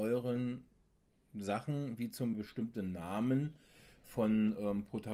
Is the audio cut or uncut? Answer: cut